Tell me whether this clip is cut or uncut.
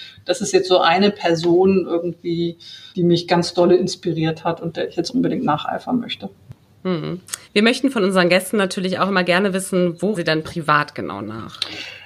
cut